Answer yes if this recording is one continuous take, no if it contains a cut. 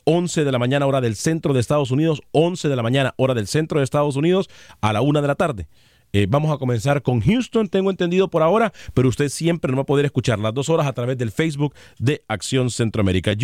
yes